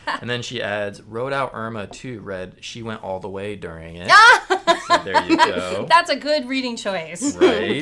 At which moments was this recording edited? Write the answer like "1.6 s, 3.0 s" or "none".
none